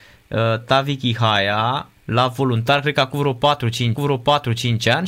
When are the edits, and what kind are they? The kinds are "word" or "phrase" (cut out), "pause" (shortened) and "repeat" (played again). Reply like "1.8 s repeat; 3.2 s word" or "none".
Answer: 2.0 s pause; 4.0 s repeat